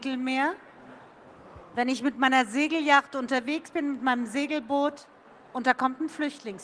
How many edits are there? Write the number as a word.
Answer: zero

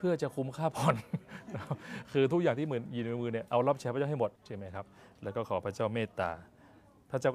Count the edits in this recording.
one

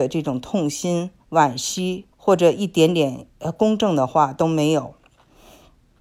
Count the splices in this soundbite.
three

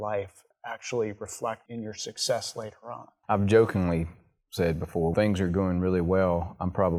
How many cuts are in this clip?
two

